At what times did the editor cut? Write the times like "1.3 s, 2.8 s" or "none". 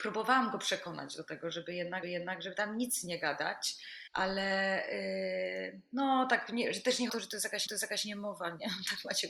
2.0 s, 4.1 s, 7.1 s, 7.7 s